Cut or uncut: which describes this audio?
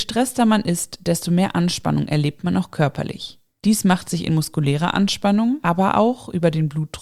uncut